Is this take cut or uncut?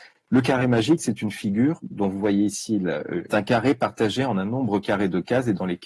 cut